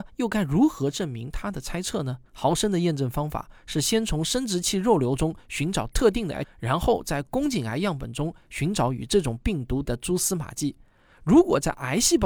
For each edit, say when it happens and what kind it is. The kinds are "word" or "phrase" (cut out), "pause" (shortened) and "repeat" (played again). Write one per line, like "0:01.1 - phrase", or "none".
0:02.3 - pause
0:06.4 - phrase
0:09.8 - word